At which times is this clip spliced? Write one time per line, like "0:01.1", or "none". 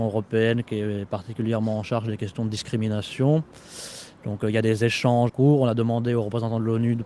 0:05.3

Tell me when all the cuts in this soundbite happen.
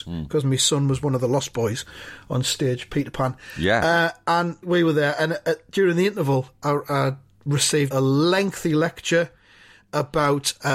0:04.6
0:07.9

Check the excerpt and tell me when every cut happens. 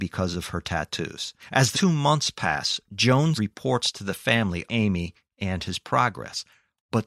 0:01.4
0:01.7
0:03.3
0:04.7

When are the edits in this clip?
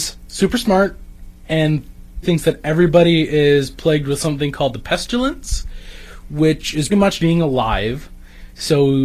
0:02.2
0:06.9
0:07.2

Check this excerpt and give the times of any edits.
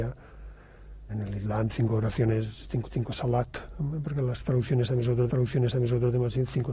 0:01.1
0:02.8
0:05.3

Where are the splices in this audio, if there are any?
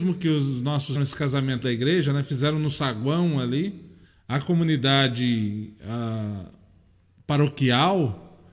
0:00.9
0:01.6
0:04.0

